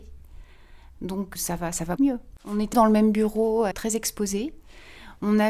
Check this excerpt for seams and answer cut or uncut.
cut